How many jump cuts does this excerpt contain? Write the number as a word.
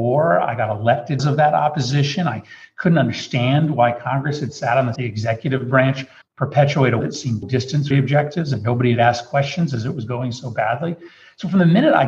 six